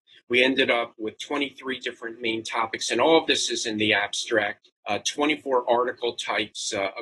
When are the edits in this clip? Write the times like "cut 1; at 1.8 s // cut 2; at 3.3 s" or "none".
cut 1; at 4.8 s

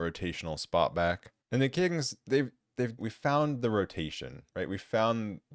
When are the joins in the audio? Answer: cut 1; at 1.4 s // cut 2; at 3.0 s // cut 3; at 4.5 s

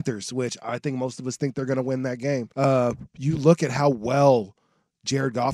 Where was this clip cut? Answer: cut 1; at 2.5 s

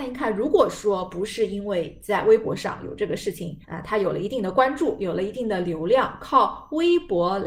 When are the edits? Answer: cut 1; at 3.6 s

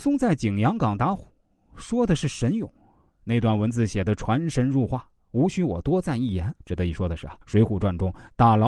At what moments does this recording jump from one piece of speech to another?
cut 1; at 6.6 s // cut 2; at 7.4 s

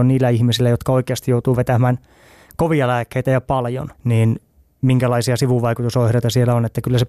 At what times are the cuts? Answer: cut 1; at 3.9 s

